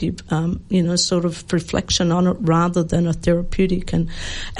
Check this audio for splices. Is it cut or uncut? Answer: uncut